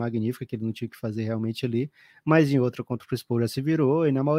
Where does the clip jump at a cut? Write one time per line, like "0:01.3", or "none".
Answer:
none